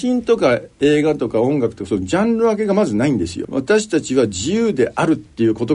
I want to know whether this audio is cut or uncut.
cut